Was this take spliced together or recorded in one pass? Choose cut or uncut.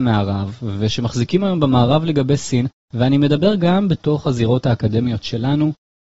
uncut